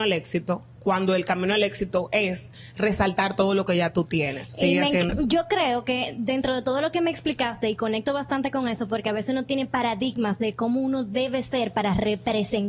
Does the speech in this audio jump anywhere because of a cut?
yes; 1 cut; at 5.1 s

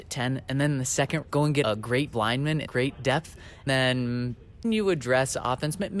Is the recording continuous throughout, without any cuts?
no; 6 cuts; at 1.2 s, 1.6 s, 2.1 s, 2.7 s, 3.7 s, 4.6 s

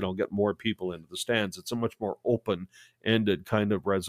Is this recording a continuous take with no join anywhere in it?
yes; 0 cuts

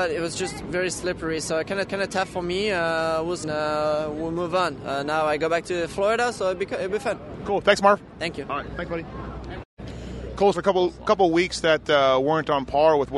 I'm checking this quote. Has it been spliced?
yes; 3 cuts; at 1.9 s, 3.4 s, 10.5 s

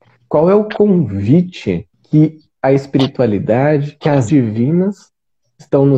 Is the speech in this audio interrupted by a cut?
yes; 1 cut; at 4.3 s

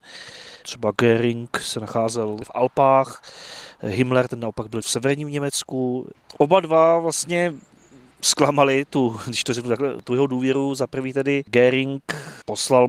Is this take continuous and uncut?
yes; 0 cuts

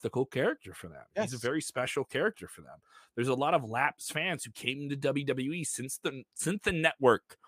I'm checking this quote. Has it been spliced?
no; 0 cuts

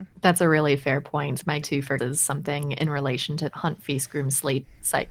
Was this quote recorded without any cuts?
no; 3 cuts; at 1.6 s, 2.0 s, 3.5 s

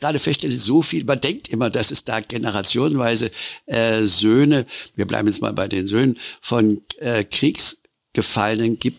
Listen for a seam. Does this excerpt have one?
no; 0 cuts

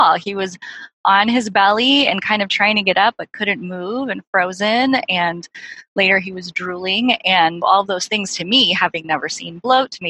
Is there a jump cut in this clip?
yes; 1 cut; at 7.6 s

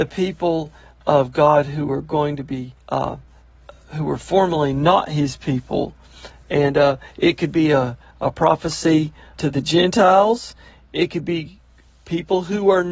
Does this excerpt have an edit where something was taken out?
yes; 2 cuts; at 2.8 s, 9.4 s

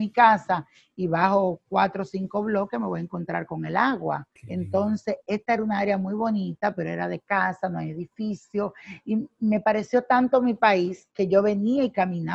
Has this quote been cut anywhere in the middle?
yes; 2 cuts; at 4.4 s, 11.1 s

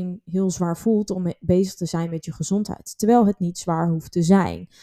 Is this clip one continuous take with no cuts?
yes; 0 cuts

